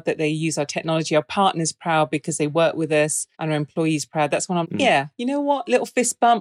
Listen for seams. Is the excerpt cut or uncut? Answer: cut